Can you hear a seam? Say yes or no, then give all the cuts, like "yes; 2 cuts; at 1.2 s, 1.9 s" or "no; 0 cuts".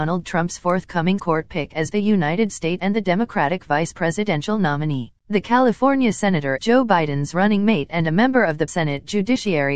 yes; 6 cuts; at 1.2 s, 1.9 s, 2.8 s, 5.2 s, 6.6 s, 8.7 s